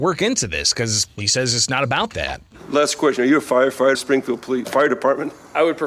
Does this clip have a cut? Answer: yes; 2 cuts; at 3.9 s, 4.6 s

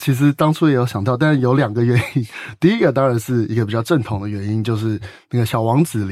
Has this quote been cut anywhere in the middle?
no; 0 cuts

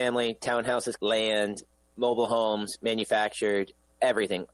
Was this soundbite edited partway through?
yes; 1 cut; at 1.0 s

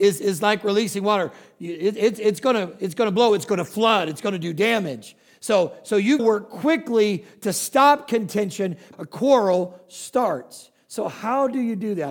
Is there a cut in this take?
yes; 2 cuts; at 6.2 s, 8.9 s

